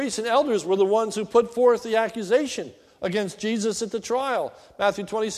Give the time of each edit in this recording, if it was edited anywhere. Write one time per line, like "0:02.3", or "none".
none